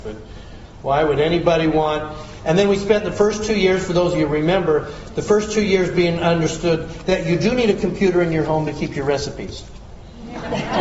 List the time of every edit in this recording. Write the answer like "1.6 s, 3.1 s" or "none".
none